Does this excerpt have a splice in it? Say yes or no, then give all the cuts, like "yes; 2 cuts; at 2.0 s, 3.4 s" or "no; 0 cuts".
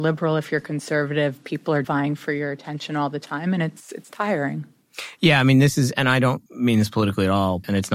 yes; 2 cuts; at 1.8 s, 6.5 s